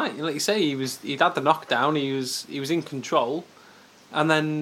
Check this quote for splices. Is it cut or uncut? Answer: uncut